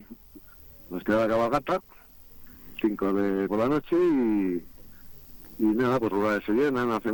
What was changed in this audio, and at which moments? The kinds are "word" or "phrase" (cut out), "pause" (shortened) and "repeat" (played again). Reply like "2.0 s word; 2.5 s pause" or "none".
2.7 s word; 3.5 s word; 6.1 s phrase